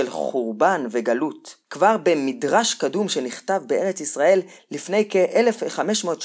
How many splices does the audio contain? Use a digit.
1